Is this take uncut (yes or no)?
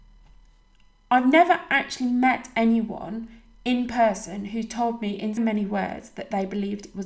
no